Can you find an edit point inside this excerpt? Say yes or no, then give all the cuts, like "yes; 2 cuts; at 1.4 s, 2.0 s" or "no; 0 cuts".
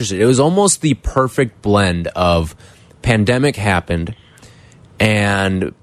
no; 0 cuts